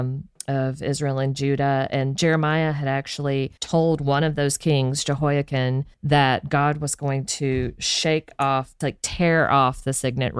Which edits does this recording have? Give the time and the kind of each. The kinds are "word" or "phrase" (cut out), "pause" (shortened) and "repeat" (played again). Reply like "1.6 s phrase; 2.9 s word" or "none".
3.6 s pause; 5.9 s pause